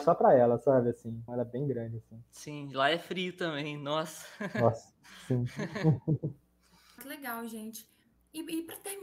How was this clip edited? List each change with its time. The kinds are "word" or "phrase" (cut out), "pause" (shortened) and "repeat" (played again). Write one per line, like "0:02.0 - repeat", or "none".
0:01.3 - word
0:07.0 - word